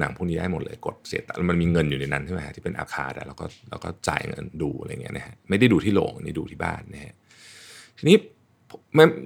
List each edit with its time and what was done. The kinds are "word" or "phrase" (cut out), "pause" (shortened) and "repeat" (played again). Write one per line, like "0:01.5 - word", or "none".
0:02.9 - phrase
0:04.0 - pause